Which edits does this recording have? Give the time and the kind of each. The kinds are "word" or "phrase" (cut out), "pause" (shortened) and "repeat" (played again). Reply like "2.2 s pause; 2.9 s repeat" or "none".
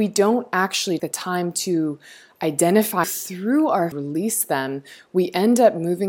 1.0 s word; 3.0 s phrase; 3.9 s phrase